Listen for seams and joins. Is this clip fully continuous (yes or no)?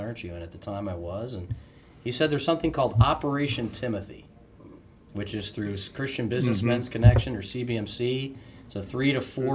yes